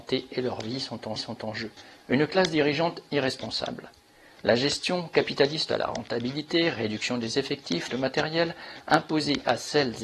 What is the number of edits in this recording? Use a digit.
3